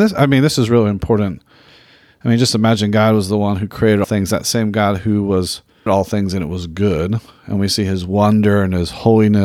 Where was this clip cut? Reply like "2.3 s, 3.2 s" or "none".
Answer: 4.0 s, 5.9 s